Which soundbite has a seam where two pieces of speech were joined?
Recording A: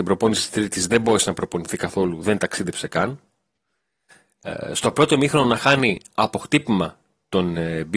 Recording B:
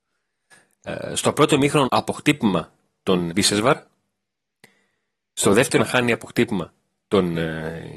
B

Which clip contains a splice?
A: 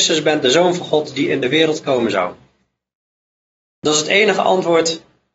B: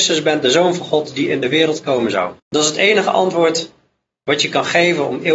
B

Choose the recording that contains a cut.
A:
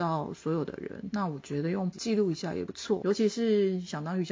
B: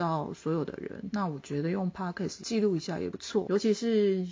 A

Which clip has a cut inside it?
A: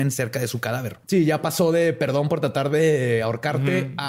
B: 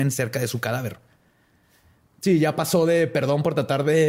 A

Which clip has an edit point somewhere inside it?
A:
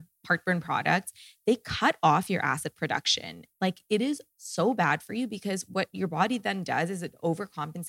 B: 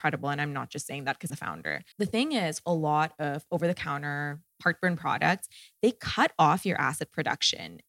B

